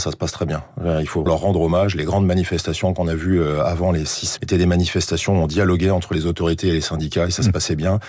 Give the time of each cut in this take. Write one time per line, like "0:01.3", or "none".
0:01.3
0:04.4